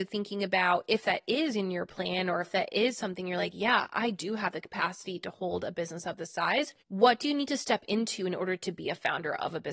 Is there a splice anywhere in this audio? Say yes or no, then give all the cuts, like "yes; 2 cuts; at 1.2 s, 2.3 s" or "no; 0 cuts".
yes; 1 cut; at 6.8 s